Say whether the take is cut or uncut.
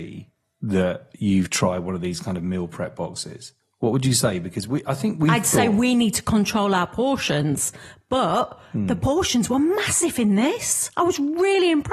uncut